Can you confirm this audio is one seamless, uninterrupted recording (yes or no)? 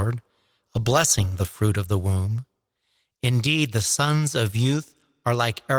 yes